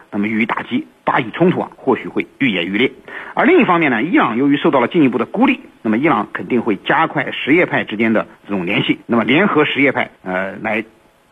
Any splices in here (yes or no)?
yes